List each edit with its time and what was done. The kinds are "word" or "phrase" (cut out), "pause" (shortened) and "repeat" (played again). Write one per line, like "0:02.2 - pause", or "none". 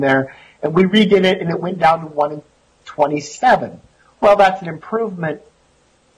none